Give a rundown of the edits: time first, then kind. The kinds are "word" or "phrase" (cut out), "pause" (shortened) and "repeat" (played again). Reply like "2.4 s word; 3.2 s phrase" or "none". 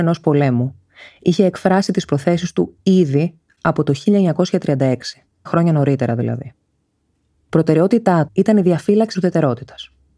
5.5 s word; 8.3 s word; 9.1 s word